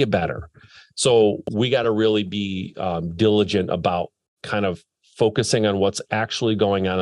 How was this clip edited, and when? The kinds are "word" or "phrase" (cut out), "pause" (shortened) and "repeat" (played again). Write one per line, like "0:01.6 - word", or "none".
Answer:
none